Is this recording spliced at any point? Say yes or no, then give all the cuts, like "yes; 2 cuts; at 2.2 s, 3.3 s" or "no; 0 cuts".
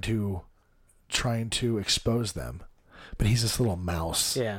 no; 0 cuts